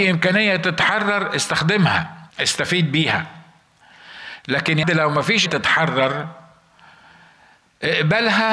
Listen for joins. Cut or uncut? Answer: cut